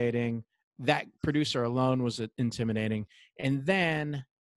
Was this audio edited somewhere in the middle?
no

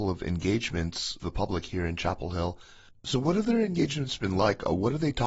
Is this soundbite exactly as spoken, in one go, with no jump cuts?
no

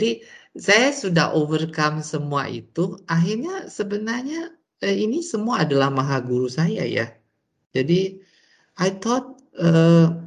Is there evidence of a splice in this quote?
no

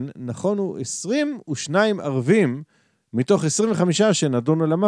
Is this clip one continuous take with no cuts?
yes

